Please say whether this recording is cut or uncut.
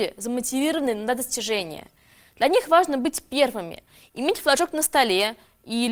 uncut